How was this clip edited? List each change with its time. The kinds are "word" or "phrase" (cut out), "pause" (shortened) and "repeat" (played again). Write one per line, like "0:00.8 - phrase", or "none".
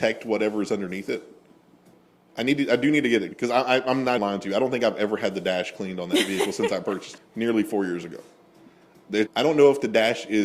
0:03.3 - word
0:04.2 - word
0:07.2 - word
0:09.3 - word